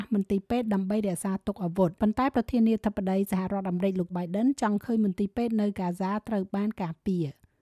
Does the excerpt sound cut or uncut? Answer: cut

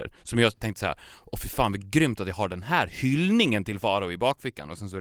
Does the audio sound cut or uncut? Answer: uncut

